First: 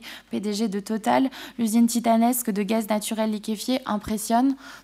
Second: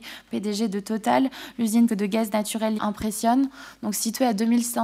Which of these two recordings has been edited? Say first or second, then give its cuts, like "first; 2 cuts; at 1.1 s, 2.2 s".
second; 2 cuts; at 1.9 s, 2.8 s